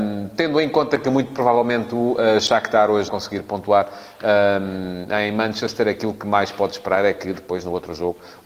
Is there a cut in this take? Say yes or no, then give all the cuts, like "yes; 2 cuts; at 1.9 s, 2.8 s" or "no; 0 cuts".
yes; 1 cut; at 3.1 s